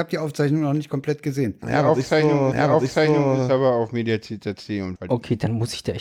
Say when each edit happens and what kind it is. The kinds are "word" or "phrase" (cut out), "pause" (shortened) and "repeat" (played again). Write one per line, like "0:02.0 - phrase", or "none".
0:02.5 - repeat
0:05.0 - word